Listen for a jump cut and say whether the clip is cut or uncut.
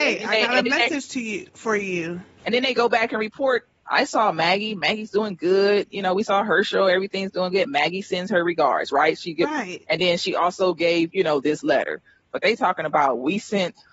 uncut